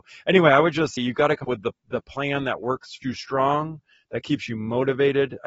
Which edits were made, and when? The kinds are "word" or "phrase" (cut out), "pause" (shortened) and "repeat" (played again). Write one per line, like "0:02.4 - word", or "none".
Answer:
0:01.0 - word
0:01.4 - word
0:03.0 - phrase